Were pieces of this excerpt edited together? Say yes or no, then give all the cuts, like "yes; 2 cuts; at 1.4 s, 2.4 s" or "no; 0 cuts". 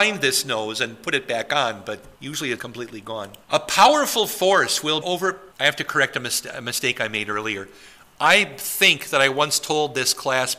yes; 5 cuts; at 2.1 s, 2.6 s, 3.4 s, 5.0 s, 5.5 s